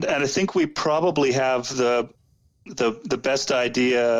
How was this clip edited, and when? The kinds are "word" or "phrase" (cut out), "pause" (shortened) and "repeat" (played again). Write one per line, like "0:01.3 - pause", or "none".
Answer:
none